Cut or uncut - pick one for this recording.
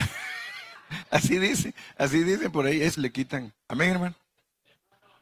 cut